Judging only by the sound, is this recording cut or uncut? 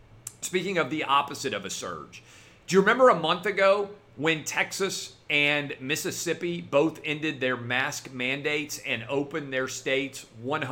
uncut